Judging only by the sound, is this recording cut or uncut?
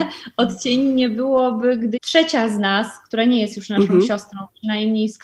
cut